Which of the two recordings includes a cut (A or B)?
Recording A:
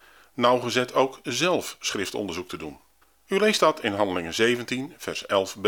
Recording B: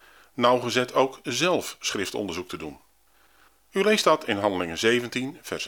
A